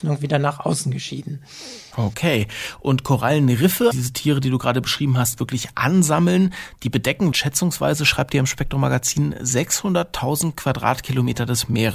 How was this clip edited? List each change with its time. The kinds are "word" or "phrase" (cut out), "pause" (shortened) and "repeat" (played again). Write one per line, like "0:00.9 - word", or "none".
0:03.9 - phrase
0:07.3 - word